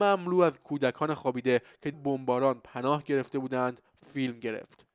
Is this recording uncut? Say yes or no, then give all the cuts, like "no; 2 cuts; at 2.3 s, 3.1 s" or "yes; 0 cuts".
no; 1 cut; at 1.9 s